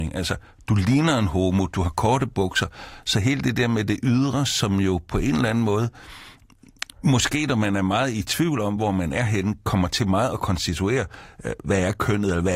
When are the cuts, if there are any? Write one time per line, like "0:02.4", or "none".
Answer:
none

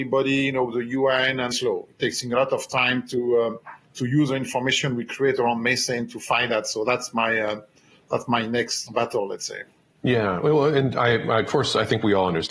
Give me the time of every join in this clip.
0:01.5
0:08.9

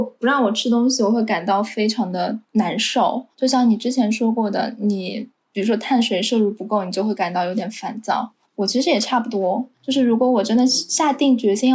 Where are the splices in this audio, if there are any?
0:02.4
0:03.3
0:08.4
0:09.7

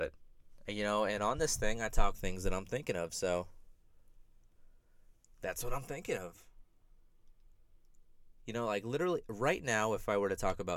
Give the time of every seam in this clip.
0:02.1

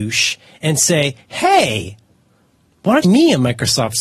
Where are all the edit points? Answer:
0:01.2
0:03.0

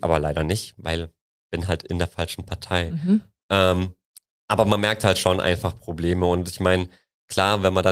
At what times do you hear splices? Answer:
none

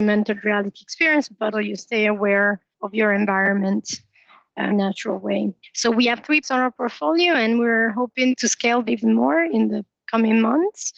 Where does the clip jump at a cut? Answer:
0:01.5
0:02.7
0:04.7
0:06.4
0:08.3
0:08.9

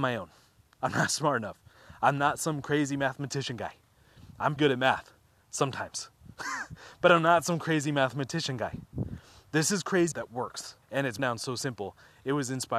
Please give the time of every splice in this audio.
0:04.6
0:10.1
0:10.8
0:11.2

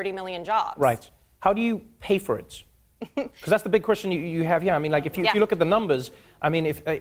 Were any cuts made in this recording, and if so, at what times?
none

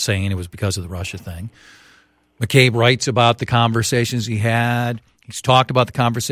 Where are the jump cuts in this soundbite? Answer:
none

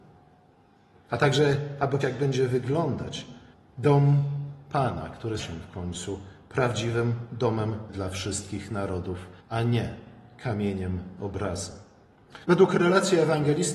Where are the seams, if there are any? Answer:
0:02.0
0:03.5
0:05.4
0:07.9
0:09.4
0:12.4

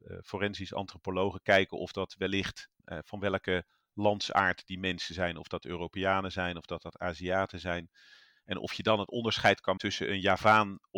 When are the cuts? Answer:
0:02.8
0:09.8

